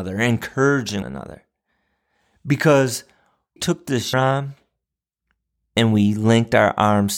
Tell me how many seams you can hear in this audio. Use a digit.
3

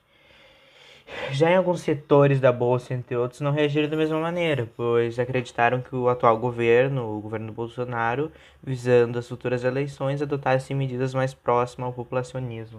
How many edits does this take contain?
0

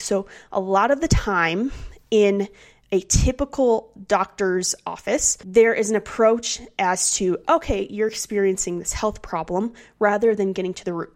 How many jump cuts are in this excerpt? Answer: 0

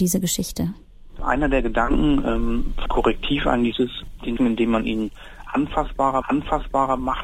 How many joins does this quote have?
4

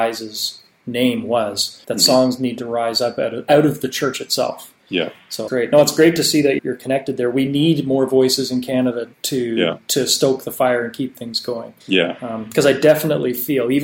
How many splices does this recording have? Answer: 6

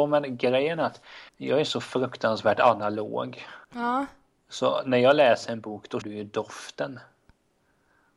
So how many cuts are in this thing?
3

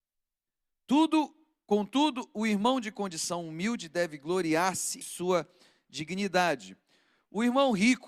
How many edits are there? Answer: 1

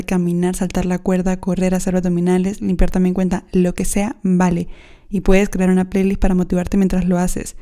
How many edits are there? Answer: 0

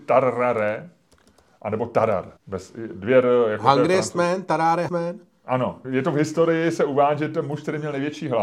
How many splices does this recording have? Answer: 3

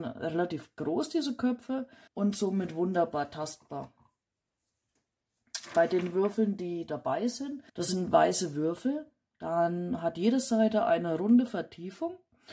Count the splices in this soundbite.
2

